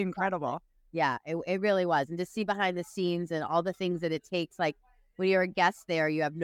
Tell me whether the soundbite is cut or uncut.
uncut